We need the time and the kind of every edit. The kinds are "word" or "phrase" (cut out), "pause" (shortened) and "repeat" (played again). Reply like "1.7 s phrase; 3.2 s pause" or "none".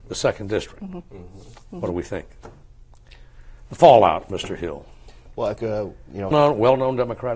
4.3 s word; 5.6 s word; 6.3 s word